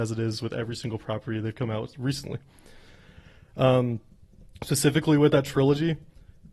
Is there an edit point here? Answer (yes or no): no